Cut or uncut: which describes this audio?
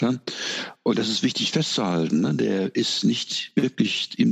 uncut